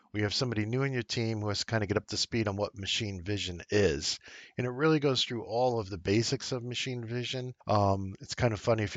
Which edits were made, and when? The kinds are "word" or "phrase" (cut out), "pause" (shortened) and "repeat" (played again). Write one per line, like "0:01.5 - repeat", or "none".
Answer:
0:07.6 - pause